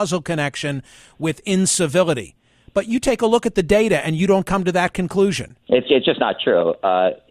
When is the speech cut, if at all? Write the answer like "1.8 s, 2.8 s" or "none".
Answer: 5.6 s